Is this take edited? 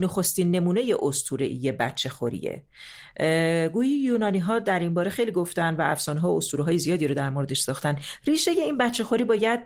no; 0 cuts

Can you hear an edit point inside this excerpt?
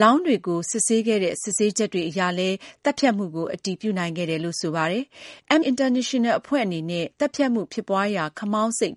yes; 1 cut; at 5.6 s

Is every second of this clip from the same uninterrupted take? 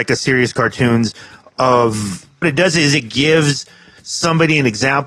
no; 1 cut; at 2.4 s

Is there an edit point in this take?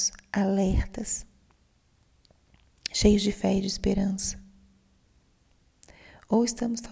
no; 0 cuts

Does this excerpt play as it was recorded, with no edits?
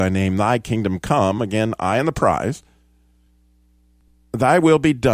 yes; 0 cuts

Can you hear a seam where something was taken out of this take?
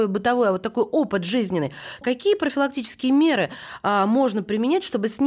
yes; 1 cut; at 2.0 s

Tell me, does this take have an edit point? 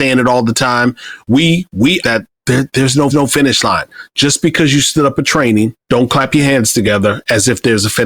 yes; 4 cuts; at 2.0 s, 2.3 s, 3.1 s, 5.8 s

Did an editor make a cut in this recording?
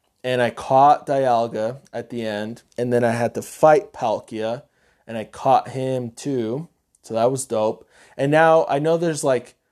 yes; 1 cut; at 2.7 s

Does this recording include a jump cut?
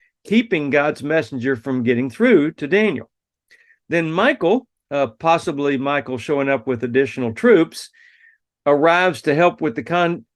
no; 0 cuts

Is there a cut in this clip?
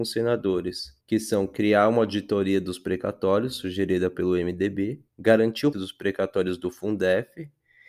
yes; 3 cuts; at 1.0 s, 5.1 s, 5.7 s

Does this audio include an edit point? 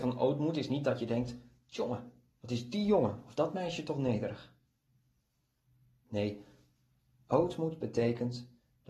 no; 0 cuts

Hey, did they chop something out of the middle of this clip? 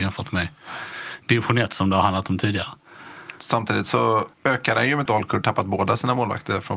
yes; 2 cuts; at 4.3 s, 5.1 s

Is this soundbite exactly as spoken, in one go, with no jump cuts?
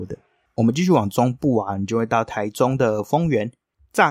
yes; 0 cuts

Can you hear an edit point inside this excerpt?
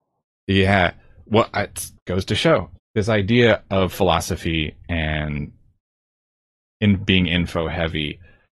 yes; 2 cuts; at 2.0 s, 2.8 s

